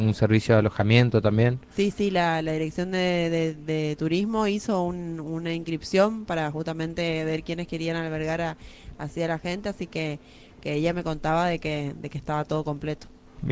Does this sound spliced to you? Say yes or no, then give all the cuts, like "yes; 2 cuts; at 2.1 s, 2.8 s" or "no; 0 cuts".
no; 0 cuts